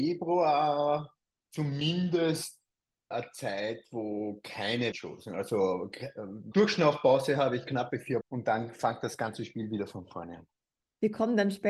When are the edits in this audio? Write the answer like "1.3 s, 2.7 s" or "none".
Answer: 3.1 s, 4.9 s, 6.5 s, 8.2 s